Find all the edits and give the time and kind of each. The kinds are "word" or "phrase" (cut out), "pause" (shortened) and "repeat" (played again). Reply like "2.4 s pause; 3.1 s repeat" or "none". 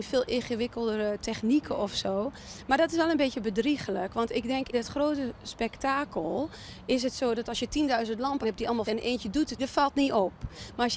4.7 s word; 8.4 s word; 8.9 s word; 9.6 s word